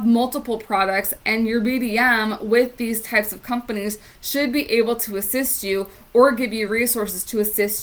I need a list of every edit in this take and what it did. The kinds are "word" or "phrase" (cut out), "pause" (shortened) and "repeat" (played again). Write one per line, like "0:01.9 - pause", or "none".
none